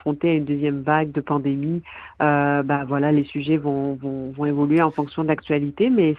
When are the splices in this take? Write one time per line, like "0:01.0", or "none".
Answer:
none